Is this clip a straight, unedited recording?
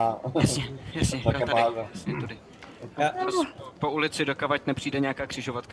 no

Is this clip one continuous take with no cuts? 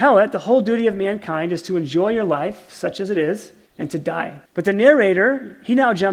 no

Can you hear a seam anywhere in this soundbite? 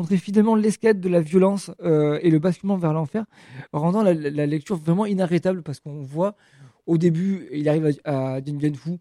no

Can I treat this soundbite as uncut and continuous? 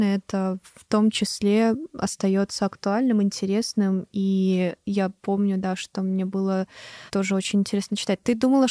no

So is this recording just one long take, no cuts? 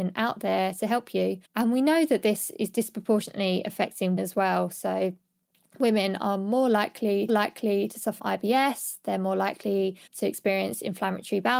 no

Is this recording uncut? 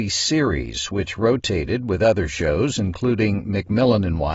yes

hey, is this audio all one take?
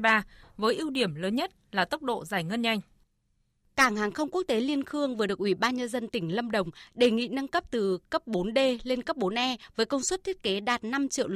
yes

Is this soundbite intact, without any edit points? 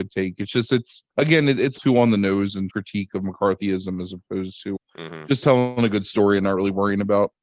no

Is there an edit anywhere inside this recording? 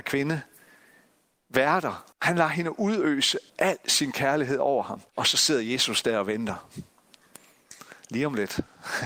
yes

